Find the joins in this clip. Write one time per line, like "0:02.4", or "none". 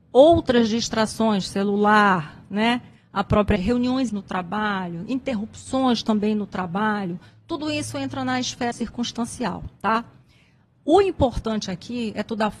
0:03.6
0:04.1
0:08.7